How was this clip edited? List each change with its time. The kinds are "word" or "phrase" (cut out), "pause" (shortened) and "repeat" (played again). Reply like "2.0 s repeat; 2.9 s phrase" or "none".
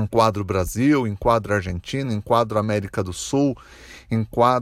none